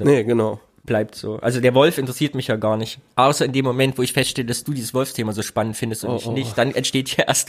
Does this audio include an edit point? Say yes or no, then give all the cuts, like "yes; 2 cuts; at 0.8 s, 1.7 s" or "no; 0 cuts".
no; 0 cuts